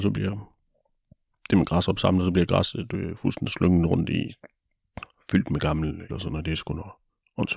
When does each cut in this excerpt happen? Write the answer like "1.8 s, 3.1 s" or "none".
6.1 s